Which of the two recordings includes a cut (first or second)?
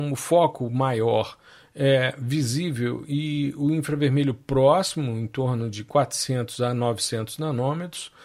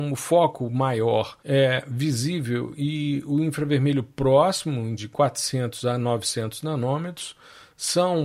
second